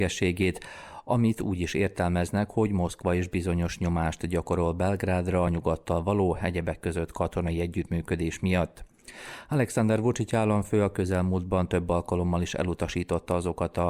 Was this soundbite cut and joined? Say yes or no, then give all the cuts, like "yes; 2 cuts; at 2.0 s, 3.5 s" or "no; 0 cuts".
no; 0 cuts